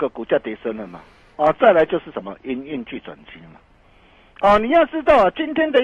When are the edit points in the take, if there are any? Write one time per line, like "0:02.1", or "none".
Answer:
0:01.2